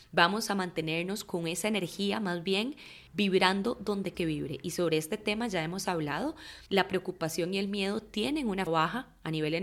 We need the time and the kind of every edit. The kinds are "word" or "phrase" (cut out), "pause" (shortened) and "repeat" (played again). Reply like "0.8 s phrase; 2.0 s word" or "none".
3.1 s pause; 4.1 s word; 6.7 s pause; 8.7 s word